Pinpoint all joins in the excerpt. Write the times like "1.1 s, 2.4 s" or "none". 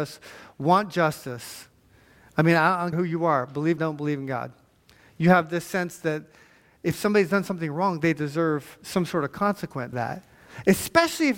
2.9 s, 3.8 s, 9.9 s